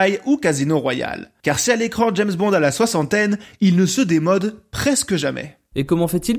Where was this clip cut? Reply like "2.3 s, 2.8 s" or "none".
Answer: none